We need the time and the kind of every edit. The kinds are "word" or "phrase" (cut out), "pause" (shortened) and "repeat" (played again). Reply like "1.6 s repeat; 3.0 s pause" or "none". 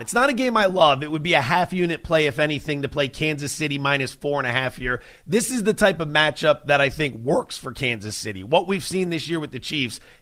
none